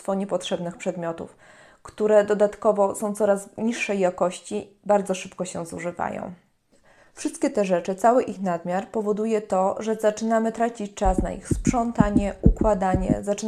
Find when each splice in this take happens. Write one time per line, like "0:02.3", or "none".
none